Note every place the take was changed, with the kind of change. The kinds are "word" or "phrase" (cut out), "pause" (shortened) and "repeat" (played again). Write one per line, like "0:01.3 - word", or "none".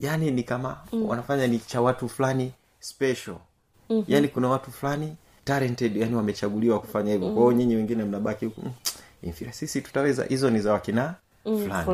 none